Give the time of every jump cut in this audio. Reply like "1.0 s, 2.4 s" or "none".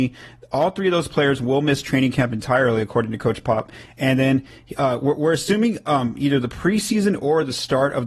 none